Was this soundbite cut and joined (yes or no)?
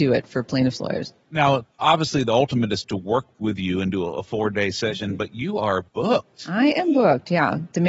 yes